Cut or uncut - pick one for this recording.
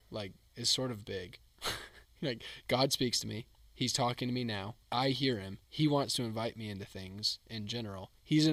cut